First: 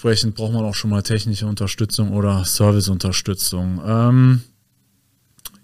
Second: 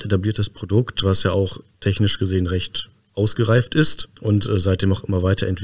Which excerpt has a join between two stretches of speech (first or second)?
second